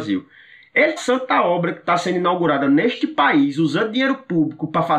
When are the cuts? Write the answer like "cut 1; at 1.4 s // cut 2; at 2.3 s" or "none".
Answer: cut 1; at 1.0 s

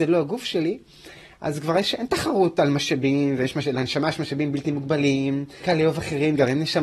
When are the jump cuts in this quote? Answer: cut 1; at 5.6 s

